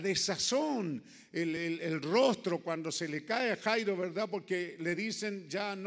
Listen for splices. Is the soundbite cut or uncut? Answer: uncut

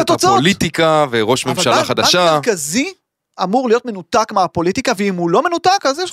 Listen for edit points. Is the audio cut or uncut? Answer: uncut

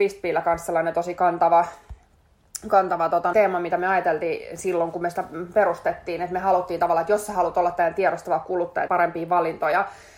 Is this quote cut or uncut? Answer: cut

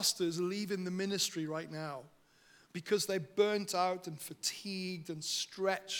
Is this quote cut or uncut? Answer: uncut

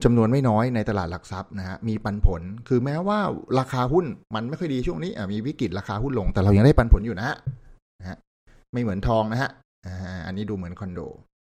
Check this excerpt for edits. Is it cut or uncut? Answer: uncut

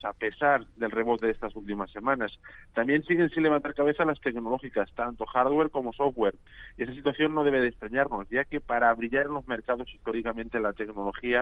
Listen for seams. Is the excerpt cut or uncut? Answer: uncut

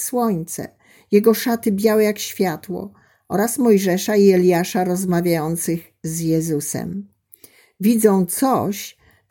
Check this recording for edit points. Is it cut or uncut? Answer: uncut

